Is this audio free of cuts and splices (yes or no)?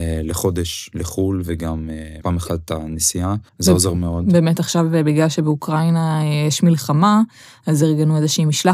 no